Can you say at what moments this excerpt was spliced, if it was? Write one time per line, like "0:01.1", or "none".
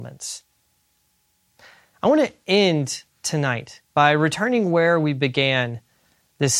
0:03.8